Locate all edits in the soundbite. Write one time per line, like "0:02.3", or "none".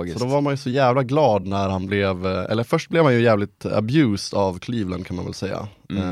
none